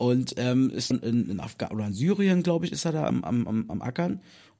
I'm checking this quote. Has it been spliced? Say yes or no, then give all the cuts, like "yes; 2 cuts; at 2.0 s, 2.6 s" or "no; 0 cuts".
yes; 2 cuts; at 0.9 s, 3.1 s